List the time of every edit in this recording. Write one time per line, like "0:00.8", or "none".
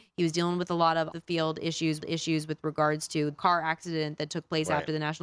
0:01.1
0:02.0
0:03.3

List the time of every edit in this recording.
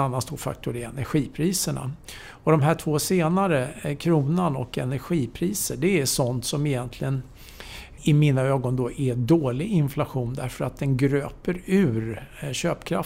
0:08.0

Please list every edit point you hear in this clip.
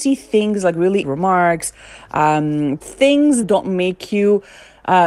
0:01.0
0:02.8
0:03.4

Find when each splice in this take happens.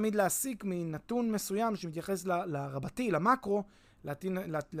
none

